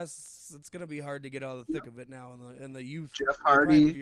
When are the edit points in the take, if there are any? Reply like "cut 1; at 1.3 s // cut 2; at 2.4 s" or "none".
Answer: none